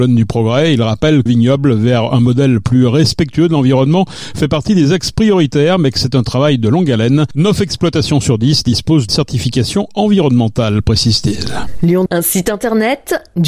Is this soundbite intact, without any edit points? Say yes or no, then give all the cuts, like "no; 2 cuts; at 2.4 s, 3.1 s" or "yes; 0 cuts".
no; 3 cuts; at 1.3 s, 9.1 s, 12.1 s